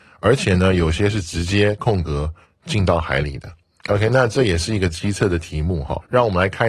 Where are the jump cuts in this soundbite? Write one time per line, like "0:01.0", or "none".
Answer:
none